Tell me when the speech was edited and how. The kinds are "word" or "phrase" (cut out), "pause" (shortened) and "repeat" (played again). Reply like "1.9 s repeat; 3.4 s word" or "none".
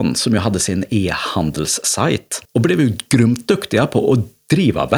2.5 s pause